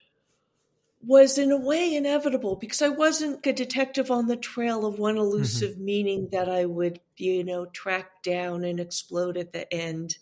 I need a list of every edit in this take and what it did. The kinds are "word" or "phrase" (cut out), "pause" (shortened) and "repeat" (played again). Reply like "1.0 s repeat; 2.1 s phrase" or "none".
3.4 s word

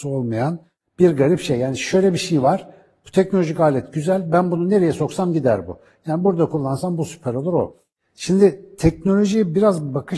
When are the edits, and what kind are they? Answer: none

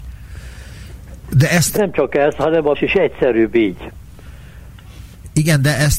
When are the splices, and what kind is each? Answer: 1.8 s word; 2.7 s word

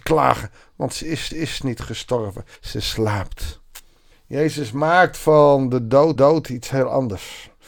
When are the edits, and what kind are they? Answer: 1.3 s repeat; 2.6 s pause; 4.1 s pause; 6.2 s repeat

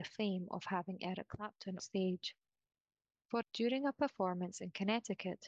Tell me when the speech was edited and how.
1.8 s word; 3.4 s word

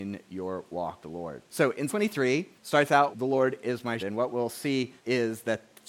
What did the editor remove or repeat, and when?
1.0 s word; 1.5 s pause; 1.9 s word; 2.6 s pause; 3.1 s word; 4.0 s word; 5.0 s pause

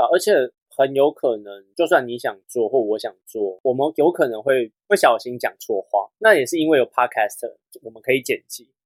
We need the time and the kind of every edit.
6.1 s pause

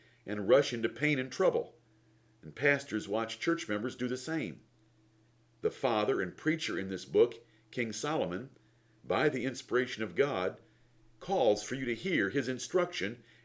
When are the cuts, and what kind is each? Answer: none

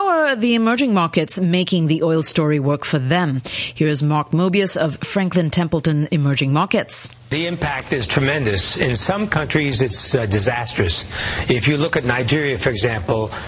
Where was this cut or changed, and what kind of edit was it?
7.2 s pause

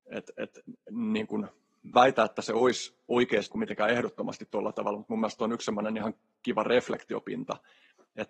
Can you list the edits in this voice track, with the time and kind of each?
1.9 s word; 3.5 s word

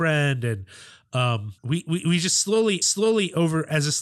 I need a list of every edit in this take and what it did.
1.6 s pause; 2.8 s repeat

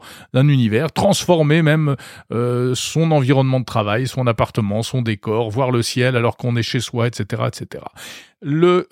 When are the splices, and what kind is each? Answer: none

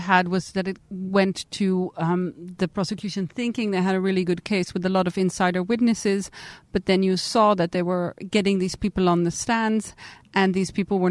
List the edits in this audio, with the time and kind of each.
none

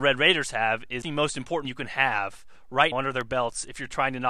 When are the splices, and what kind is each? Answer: 1.0 s phrase; 1.6 s word; 2.9 s word

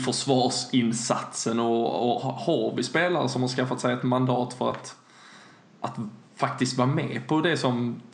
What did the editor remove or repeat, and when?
none

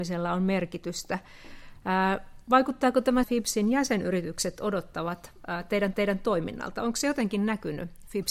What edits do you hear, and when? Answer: 3.2 s phrase; 5.9 s repeat

